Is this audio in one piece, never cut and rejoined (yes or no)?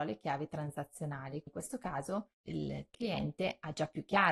no